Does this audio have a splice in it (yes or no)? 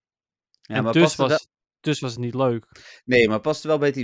no